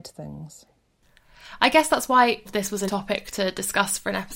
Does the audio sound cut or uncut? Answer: cut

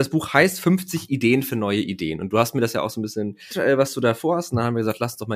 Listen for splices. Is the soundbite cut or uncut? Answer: cut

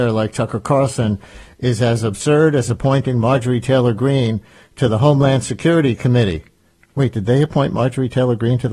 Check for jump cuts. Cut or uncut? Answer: uncut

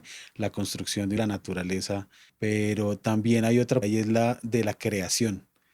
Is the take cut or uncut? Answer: cut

